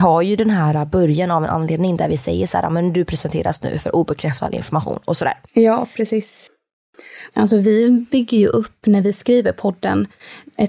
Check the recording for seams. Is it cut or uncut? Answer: uncut